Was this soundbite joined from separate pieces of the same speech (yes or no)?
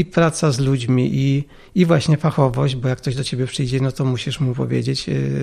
no